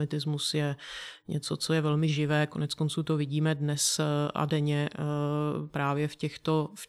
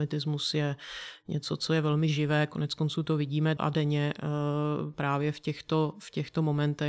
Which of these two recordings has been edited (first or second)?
second